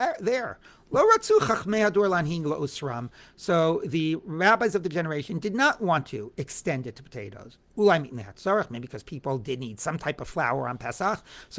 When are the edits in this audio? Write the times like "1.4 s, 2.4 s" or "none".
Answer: none

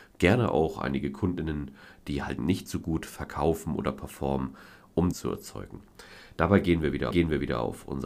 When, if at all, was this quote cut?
2.4 s, 5.1 s, 7.1 s

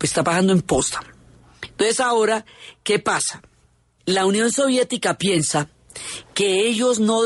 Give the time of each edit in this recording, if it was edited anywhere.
none

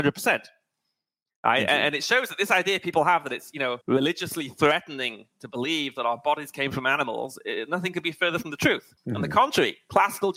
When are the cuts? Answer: 3.8 s, 9.0 s

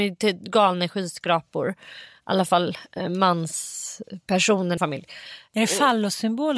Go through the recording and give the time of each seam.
4.8 s

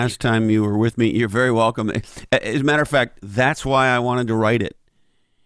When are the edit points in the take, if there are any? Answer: none

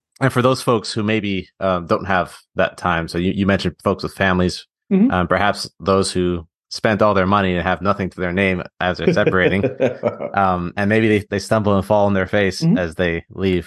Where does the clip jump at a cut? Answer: none

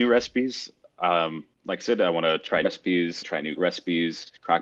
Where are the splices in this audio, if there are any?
1.5 s, 2.6 s, 3.2 s, 3.6 s

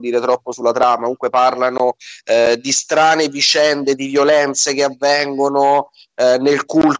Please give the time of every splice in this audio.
none

